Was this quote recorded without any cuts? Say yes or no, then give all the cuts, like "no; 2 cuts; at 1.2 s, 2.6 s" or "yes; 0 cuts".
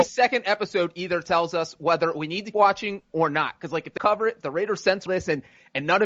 no; 3 cuts; at 2.5 s, 4.0 s, 5.1 s